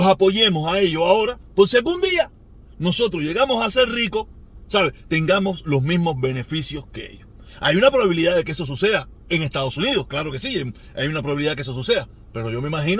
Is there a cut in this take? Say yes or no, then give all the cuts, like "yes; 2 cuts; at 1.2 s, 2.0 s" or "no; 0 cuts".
no; 0 cuts